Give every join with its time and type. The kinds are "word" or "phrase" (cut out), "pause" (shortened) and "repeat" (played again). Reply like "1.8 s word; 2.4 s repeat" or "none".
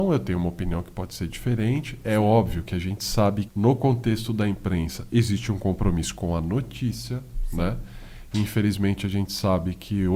3.5 s word